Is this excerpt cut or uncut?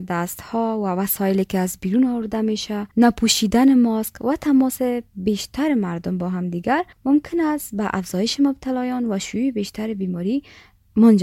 cut